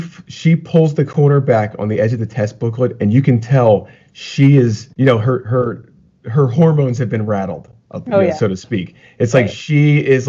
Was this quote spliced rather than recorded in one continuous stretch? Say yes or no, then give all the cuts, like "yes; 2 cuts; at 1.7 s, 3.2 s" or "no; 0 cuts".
yes; 1 cut; at 4.9 s